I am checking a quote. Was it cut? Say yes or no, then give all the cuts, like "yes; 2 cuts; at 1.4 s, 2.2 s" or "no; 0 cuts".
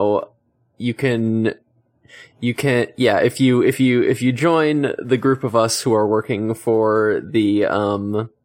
no; 0 cuts